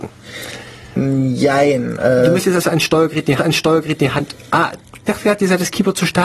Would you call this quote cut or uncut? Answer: cut